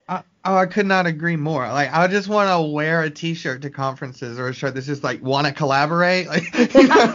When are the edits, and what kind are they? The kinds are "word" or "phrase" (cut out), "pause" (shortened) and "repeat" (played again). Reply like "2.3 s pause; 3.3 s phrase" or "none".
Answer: none

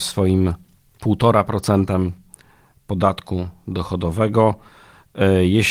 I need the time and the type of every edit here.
none

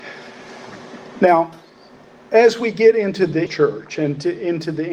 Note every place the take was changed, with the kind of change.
3.5 s word

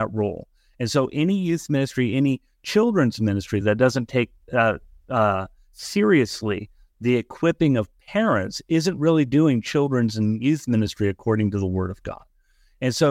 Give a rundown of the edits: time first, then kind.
none

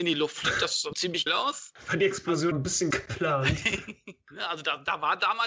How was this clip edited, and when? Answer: 0.9 s word; 1.3 s word; 2.5 s phrase; 2.9 s phrase

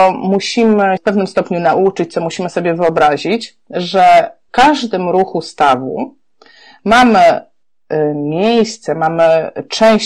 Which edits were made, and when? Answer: 1.0 s word; 4.5 s word

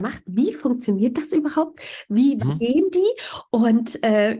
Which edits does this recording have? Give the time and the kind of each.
2.4 s word

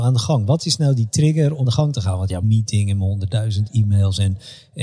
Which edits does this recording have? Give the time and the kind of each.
1.6 s word; 2.4 s phrase

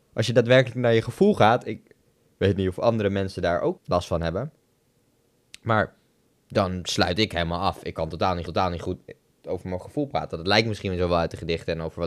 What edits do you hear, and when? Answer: 3.8 s word; 8.5 s repeat

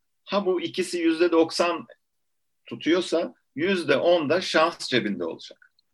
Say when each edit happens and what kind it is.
none

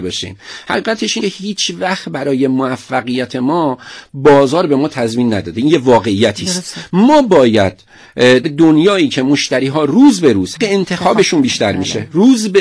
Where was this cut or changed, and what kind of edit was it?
1.2 s word; 8.4 s word; 10.6 s word

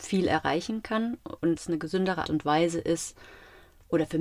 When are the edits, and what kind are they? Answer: 1.6 s word; 2.2 s word

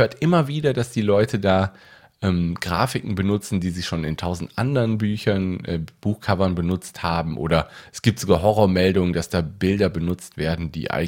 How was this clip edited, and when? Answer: none

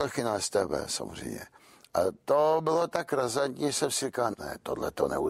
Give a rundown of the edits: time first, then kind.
4.3 s word

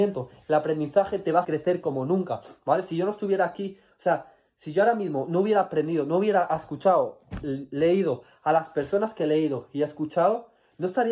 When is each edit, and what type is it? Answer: 1.4 s word

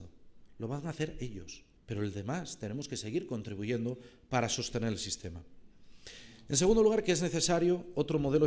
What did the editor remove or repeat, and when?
1.8 s pause

